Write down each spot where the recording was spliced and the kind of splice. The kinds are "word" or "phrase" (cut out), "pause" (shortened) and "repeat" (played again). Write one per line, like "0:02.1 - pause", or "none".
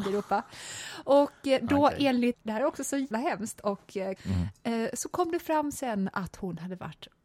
0:02.3 - word
0:03.1 - word
0:04.2 - word